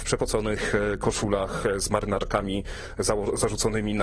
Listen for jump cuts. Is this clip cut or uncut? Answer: uncut